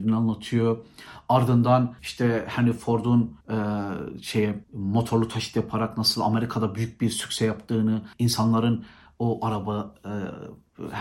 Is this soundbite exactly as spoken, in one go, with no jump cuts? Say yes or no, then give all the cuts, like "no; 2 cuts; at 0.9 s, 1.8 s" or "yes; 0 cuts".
no; 4 cuts; at 2.0 s, 3.4 s, 4.6 s, 8.1 s